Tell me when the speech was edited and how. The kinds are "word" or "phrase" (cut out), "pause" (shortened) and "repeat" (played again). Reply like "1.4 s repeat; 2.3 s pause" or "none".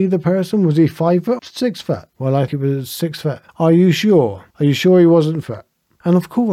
1.4 s word; 2.1 s pause; 2.5 s word; 3.5 s pause; 4.5 s pause; 5.4 s word